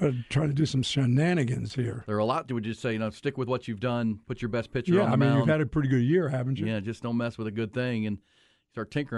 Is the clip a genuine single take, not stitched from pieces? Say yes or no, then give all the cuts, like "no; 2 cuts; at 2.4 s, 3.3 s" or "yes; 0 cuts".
yes; 0 cuts